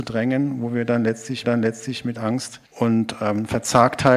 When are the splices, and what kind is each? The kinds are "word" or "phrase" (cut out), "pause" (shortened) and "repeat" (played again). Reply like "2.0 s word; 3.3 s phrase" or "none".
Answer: 1.4 s repeat; 2.7 s pause